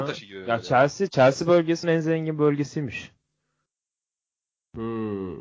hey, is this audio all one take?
no; 1 cut; at 1.8 s

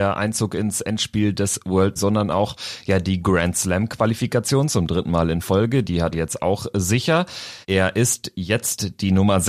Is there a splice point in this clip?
yes; 3 cuts; at 2.0 s, 6.1 s, 7.6 s

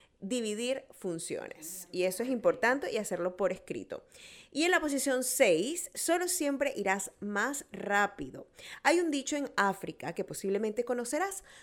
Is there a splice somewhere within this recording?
no; 0 cuts

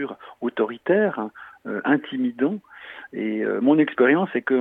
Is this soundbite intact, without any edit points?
yes; 0 cuts

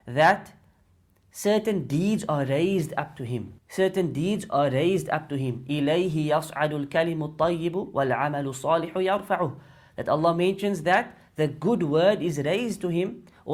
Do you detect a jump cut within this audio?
yes; 1 cut; at 3.6 s

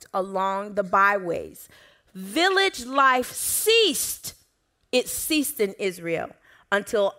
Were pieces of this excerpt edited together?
no; 0 cuts

